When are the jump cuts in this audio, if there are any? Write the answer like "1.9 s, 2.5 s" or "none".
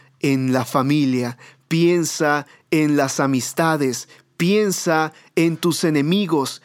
none